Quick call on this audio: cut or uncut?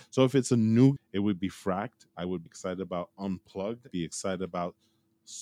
cut